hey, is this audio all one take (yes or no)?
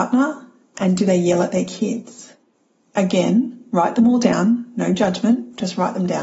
yes